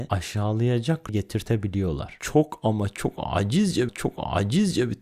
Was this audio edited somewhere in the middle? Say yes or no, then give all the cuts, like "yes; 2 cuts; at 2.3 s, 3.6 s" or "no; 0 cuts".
yes; 2 cuts; at 1.1 s, 3.9 s